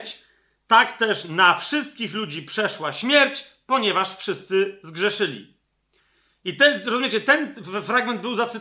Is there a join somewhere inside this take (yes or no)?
no